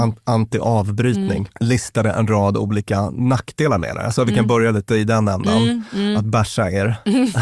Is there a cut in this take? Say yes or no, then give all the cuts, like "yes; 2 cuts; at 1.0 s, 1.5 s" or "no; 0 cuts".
yes; 1 cut; at 1.5 s